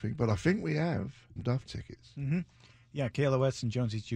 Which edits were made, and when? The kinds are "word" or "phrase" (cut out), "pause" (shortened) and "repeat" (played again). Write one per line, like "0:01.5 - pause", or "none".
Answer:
0:01.4 - word
0:01.7 - word